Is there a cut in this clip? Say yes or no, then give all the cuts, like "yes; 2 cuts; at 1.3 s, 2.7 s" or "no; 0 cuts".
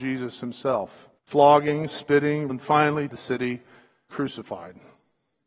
yes; 4 cuts; at 1.2 s, 2.5 s, 3.1 s, 4.1 s